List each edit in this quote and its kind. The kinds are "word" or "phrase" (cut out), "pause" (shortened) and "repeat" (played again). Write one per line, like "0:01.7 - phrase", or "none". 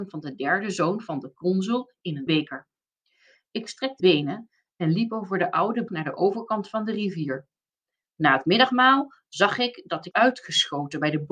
0:02.3 - word
0:04.0 - word
0:05.9 - word
0:10.1 - word